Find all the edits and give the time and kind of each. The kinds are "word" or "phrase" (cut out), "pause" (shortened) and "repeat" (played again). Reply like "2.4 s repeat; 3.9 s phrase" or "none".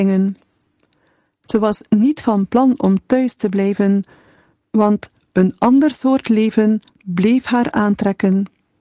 none